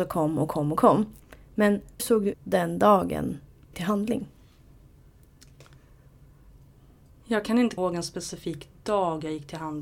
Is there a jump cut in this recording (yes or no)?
yes